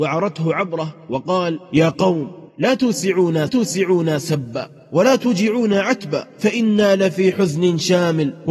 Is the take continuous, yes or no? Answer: no